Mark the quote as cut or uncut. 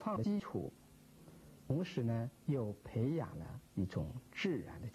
cut